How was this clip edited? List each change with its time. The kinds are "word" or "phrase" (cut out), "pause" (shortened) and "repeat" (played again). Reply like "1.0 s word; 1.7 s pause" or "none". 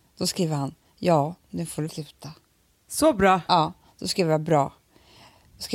1.9 s word